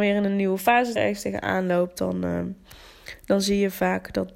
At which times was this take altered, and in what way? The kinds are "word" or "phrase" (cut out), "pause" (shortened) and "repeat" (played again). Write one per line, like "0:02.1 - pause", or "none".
0:01.0 - phrase